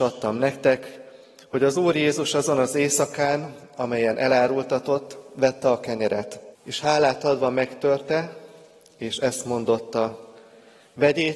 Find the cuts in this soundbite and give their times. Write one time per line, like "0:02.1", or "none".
0:06.5